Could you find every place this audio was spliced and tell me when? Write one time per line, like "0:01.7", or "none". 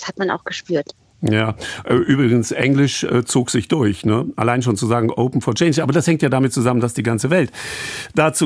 none